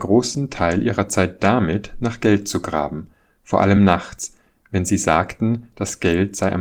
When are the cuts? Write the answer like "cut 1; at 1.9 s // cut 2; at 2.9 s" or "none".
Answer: none